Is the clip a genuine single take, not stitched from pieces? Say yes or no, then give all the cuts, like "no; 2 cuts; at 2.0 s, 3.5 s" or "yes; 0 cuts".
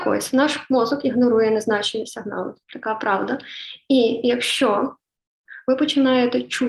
no; 1 cut; at 2.6 s